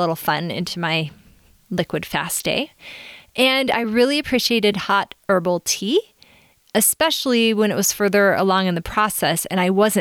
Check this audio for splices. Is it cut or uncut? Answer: uncut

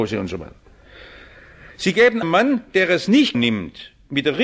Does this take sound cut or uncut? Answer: cut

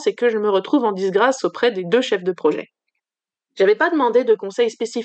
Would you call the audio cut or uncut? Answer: uncut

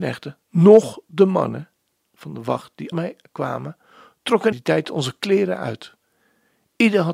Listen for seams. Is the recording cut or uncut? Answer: cut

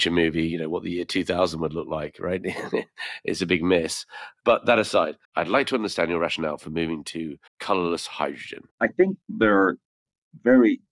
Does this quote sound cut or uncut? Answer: cut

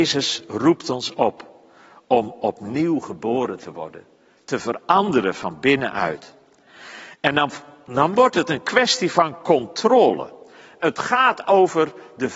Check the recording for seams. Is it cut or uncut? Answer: uncut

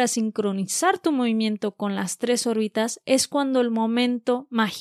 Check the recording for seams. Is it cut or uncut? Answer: uncut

